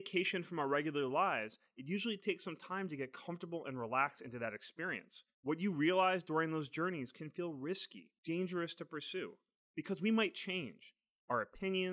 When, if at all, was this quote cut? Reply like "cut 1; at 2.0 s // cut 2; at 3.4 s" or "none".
cut 1; at 5.3 s // cut 2; at 8.2 s